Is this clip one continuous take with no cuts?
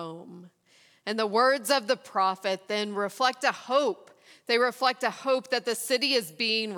yes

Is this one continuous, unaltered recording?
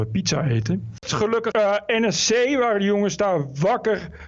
no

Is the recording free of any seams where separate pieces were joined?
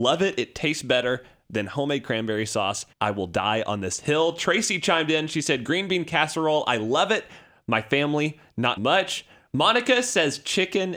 no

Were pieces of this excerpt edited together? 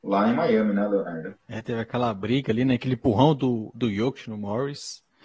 yes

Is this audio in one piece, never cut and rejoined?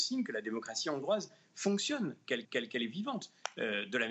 no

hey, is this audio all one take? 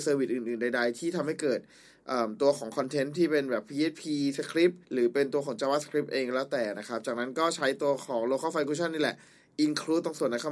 no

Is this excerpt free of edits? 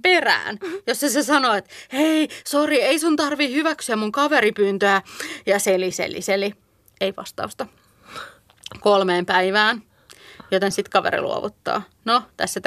yes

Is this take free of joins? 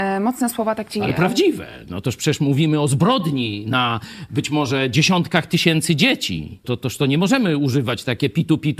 no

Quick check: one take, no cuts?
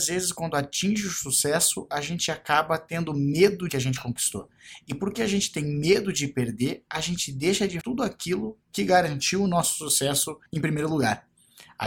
no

